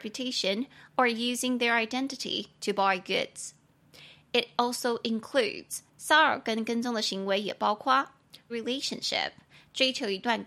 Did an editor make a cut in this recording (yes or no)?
yes